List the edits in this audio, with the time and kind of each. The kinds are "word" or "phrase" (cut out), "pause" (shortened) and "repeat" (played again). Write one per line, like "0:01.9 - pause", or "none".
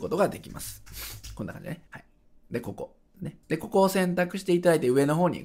0:01.9 - pause
0:02.2 - pause
0:03.4 - pause

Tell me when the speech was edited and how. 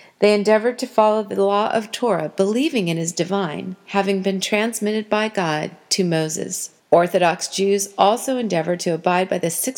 0:06.8 - pause

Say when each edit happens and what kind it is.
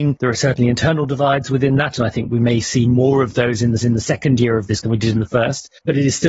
0:03.8 - repeat
0:04.8 - word

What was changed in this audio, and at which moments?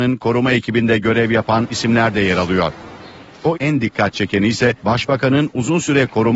0:01.7 - word
0:03.5 - word
0:04.8 - pause

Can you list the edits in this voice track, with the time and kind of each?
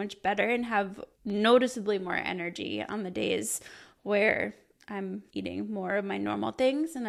0:01.1 - pause
0:05.3 - pause

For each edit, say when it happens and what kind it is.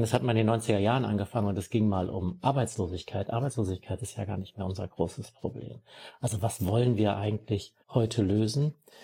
0:07.8 - pause

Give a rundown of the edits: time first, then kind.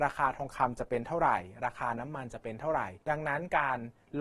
0:03.0 - pause

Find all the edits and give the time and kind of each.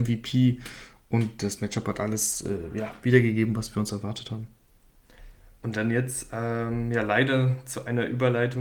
none

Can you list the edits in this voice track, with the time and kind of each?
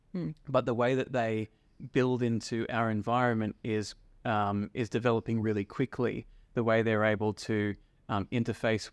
none

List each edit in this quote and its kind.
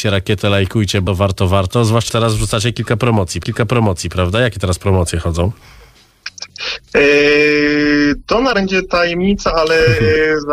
0:01.1 - word
0:02.1 - word
0:03.4 - repeat
0:08.5 - word

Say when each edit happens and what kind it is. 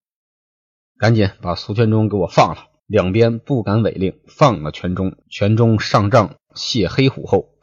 0:02.8 - pause
0:05.2 - pause
0:06.4 - pause

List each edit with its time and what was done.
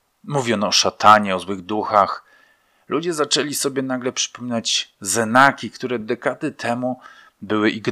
none

